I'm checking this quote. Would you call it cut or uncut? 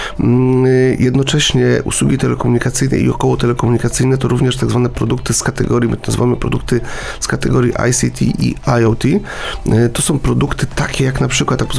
uncut